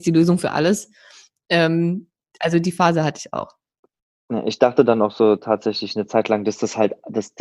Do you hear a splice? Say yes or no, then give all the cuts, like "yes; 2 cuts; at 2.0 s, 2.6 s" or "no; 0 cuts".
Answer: no; 0 cuts